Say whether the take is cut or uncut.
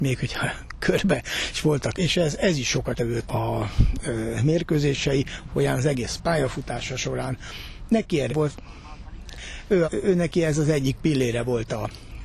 cut